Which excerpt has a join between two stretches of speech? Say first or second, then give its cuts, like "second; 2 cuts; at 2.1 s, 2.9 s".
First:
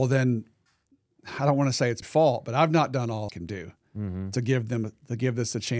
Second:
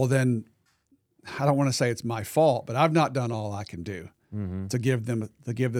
first; 2 cuts; at 2.0 s, 3.3 s